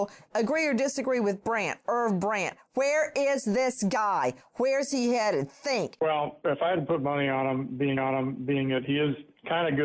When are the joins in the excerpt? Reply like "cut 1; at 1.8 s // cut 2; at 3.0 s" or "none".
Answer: cut 1; at 6.4 s // cut 2; at 8.0 s